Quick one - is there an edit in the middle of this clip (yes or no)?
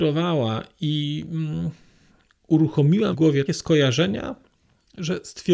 yes